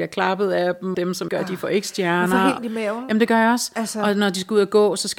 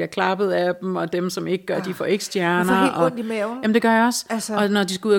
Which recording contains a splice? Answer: first; 3 cuts; at 0.9 s, 1.3 s, 2.6 s

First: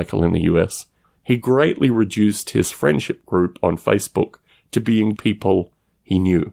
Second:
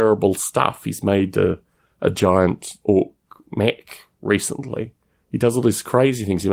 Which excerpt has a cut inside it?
first; 1 cut; at 5.2 s

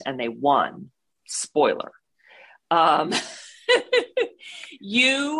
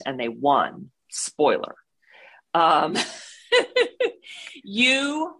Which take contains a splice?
second; 1 cut; at 1.0 s

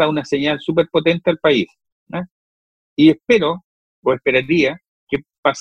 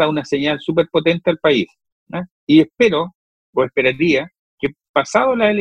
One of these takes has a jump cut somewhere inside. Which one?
second; 1 cut; at 2.3 s

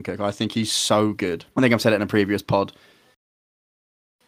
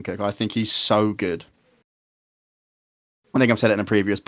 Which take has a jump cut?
first; 1 cut; at 1.5 s

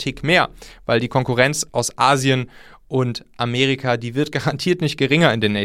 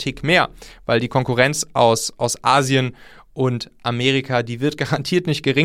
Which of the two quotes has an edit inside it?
first; 1 cut; at 1.7 s

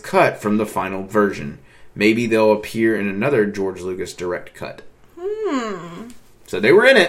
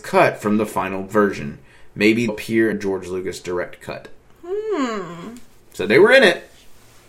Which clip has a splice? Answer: second; 2 cuts; at 2.3 s, 2.7 s

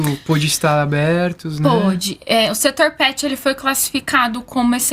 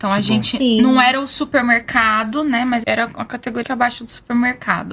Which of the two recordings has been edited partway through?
second; 2 cuts; at 2.8 s, 3.6 s

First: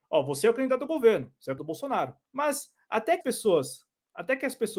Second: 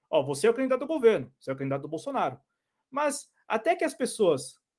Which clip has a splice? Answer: first; 3 cuts; at 1.6 s, 2.3 s, 3.2 s

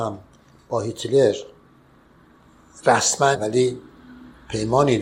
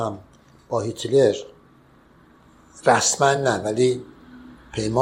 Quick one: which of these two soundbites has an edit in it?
first; 1 cut; at 3.4 s

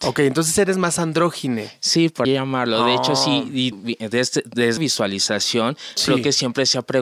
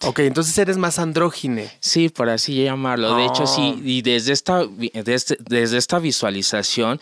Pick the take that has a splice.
first; 3 cuts; at 2.2 s, 3.7 s, 4.8 s

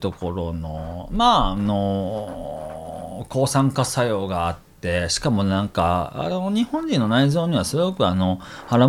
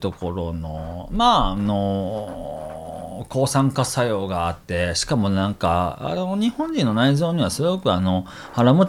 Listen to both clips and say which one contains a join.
second; 1 cut; at 4.6 s

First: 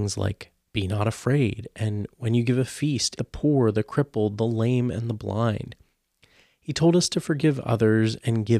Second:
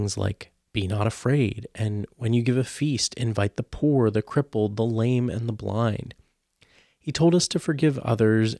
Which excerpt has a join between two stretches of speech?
first; 1 cut; at 3.1 s

